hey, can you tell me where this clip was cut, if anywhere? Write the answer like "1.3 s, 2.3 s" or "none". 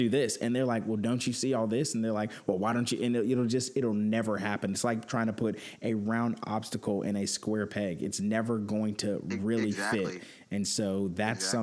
none